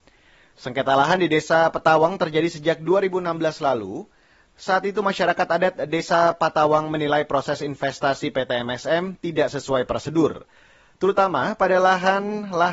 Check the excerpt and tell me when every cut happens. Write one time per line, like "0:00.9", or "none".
none